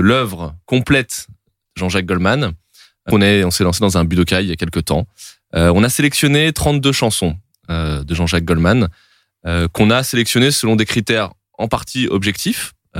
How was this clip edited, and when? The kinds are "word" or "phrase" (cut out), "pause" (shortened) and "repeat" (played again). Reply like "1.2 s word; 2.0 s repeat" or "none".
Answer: 3.1 s word